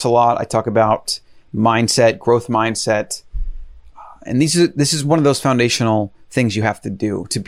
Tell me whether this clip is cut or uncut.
uncut